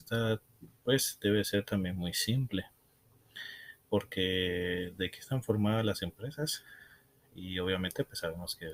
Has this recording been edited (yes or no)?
no